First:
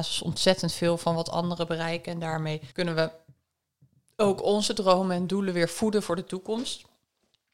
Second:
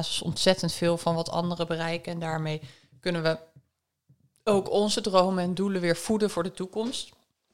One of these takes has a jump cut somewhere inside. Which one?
first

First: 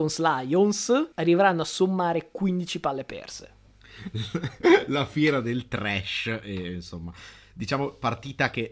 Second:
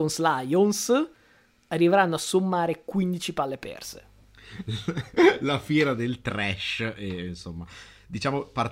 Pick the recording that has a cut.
first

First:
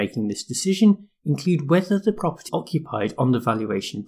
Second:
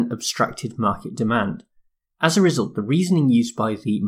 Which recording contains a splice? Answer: first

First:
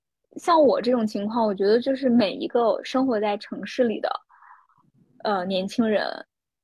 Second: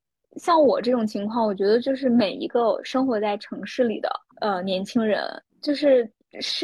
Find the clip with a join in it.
second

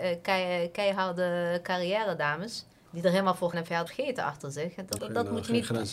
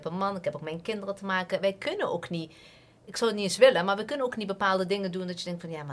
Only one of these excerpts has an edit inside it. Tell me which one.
first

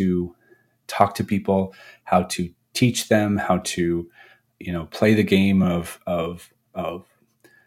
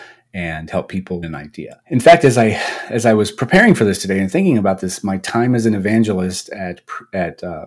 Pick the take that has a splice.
second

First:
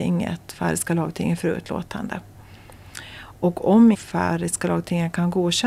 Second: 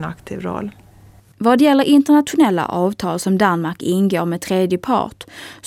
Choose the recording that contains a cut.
first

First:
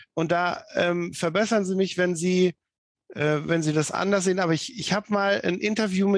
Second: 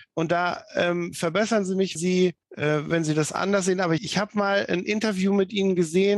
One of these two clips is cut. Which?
second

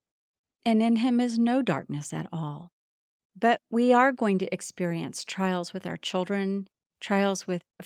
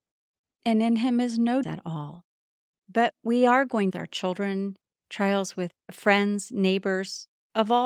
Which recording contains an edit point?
second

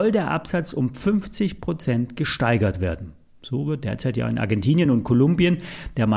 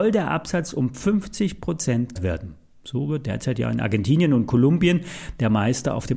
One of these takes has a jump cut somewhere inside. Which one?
second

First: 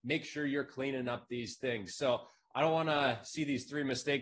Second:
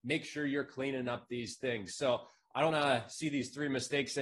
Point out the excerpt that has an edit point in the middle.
second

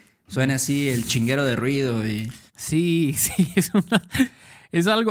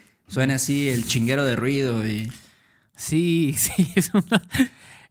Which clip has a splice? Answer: first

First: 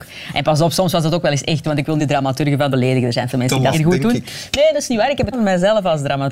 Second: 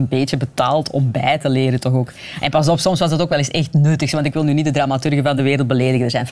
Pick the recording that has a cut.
first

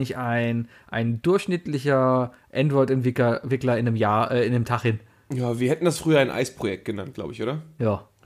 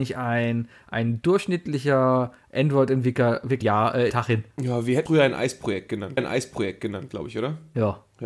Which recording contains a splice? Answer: second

